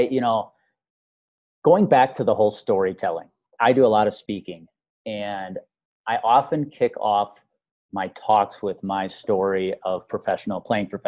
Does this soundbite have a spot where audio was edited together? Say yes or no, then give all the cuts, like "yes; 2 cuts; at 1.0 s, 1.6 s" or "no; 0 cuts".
yes; 1 cut; at 3.5 s